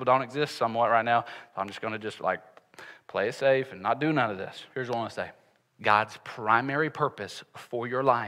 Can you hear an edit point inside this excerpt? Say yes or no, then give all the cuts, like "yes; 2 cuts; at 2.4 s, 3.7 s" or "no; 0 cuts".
yes; 2 cuts; at 4.7 s, 5.6 s